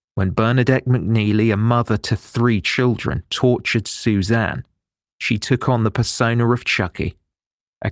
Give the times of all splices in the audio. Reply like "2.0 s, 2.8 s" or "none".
none